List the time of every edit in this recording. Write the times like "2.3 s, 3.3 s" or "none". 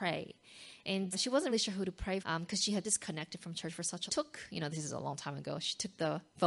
1.1 s, 1.5 s, 2.2 s, 2.8 s, 4.1 s

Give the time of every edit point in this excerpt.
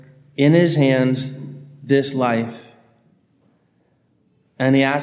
none

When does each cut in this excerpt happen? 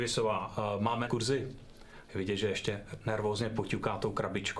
1.1 s

